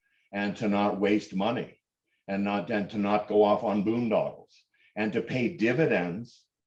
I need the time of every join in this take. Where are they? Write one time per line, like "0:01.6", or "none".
none